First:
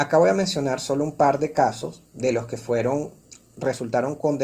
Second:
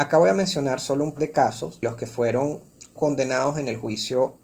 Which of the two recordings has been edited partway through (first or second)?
second